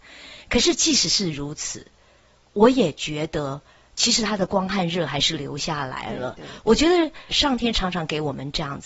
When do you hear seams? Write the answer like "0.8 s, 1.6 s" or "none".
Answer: 7.3 s

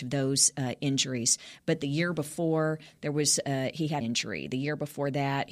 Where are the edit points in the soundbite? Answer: 4.0 s

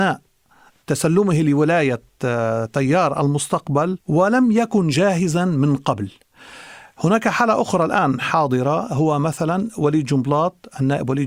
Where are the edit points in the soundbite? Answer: 4.0 s

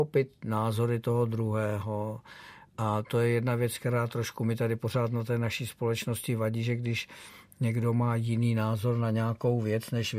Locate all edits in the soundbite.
3.0 s

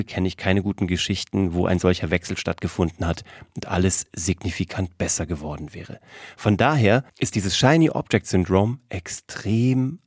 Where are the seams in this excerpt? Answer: 7.1 s

